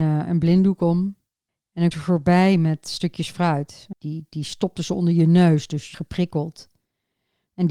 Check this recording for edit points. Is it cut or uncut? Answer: cut